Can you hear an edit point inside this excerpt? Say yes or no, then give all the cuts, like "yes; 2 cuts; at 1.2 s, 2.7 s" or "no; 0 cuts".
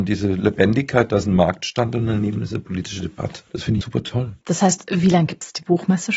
yes; 3 cuts; at 3.5 s, 3.8 s, 4.4 s